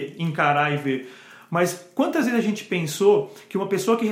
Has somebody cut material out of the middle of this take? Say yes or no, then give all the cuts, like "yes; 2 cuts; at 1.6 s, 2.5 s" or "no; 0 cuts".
no; 0 cuts